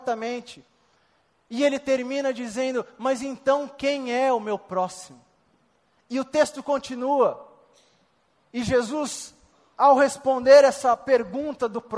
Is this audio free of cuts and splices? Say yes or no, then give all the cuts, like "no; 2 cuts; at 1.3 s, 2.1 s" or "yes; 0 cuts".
yes; 0 cuts